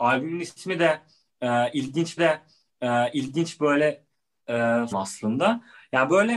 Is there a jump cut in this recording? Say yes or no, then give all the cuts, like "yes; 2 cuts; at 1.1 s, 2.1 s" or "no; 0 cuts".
yes; 2 cuts; at 2.2 s, 4.9 s